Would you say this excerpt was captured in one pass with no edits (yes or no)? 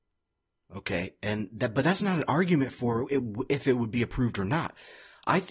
yes